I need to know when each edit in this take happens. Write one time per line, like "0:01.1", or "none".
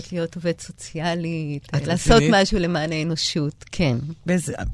none